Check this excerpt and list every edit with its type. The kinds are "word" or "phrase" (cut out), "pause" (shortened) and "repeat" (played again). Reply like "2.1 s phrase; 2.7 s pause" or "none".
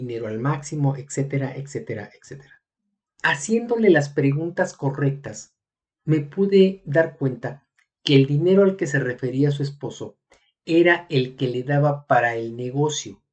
none